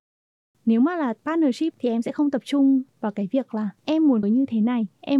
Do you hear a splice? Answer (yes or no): yes